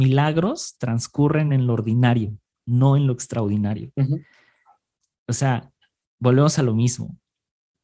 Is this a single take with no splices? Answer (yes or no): yes